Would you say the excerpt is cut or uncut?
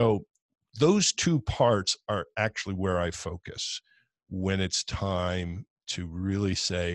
uncut